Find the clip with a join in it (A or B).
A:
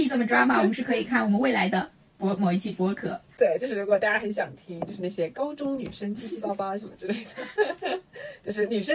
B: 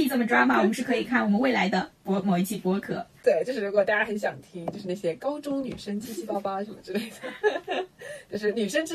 B